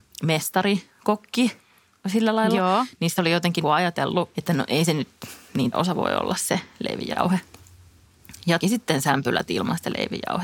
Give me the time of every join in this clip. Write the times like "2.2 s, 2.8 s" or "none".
3.2 s, 3.6 s, 4.3 s, 5.7 s, 8.6 s